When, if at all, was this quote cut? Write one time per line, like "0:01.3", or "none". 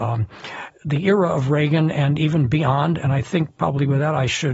none